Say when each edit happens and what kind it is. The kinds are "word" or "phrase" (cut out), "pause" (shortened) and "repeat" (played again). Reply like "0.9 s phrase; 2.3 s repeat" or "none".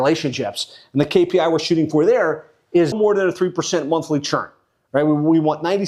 2.9 s word